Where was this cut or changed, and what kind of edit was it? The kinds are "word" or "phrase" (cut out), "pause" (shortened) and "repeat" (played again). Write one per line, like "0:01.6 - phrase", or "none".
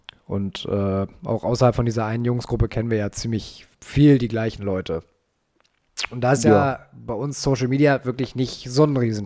0:03.7 - pause

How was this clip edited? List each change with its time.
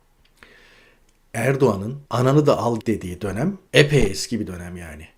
0:02.1 - pause
0:02.8 - word
0:03.7 - pause

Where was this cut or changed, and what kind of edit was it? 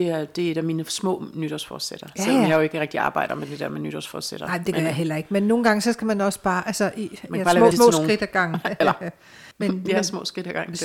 0:07.7 - word
0:09.5 - pause

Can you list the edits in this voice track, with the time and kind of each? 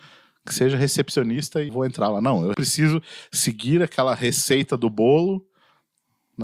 0:01.7 - word
0:02.5 - word

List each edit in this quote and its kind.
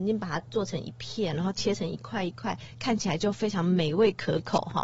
none

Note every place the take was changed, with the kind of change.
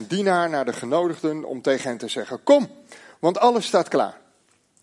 none

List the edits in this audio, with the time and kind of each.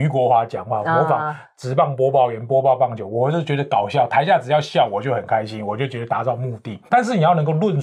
0:06.9 - pause

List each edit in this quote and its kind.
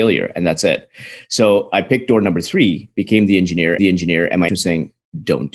0:03.8 - repeat
0:04.5 - word

